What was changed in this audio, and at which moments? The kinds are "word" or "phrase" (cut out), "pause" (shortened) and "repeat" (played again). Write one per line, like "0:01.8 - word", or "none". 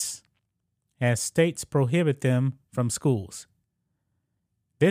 none